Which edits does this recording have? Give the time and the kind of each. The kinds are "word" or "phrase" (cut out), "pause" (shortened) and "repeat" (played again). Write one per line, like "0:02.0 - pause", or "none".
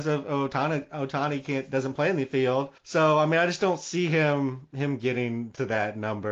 0:02.8 - pause